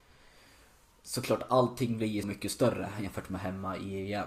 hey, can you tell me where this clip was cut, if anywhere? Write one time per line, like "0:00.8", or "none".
0:02.2